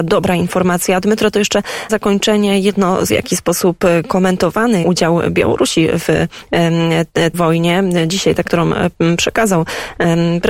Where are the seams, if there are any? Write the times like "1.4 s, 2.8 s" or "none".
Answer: 1.9 s, 3.1 s, 4.8 s, 7.3 s, 8.5 s